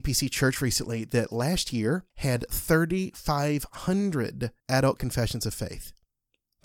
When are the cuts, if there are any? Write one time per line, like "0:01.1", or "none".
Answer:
0:02.1
0:04.6